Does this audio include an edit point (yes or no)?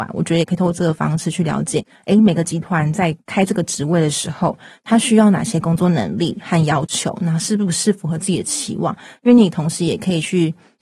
no